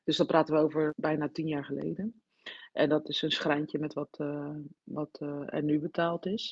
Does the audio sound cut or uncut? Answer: uncut